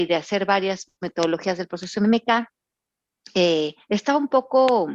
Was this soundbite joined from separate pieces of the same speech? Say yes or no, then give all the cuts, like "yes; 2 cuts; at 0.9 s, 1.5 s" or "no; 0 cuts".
yes; 2 cuts; at 1.0 s, 3.8 s